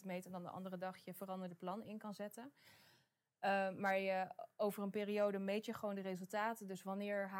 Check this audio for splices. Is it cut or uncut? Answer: uncut